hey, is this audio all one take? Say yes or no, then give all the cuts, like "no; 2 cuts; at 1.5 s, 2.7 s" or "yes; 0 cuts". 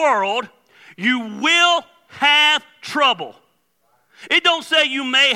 yes; 0 cuts